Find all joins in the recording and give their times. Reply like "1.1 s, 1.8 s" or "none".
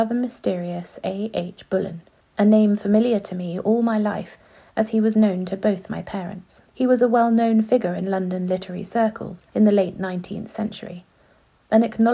2.2 s, 6.7 s, 9.5 s